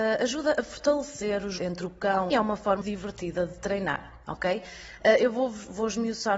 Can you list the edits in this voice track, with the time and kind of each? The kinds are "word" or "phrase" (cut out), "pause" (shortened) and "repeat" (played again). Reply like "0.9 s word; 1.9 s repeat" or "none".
1.6 s phrase; 2.3 s phrase; 2.8 s word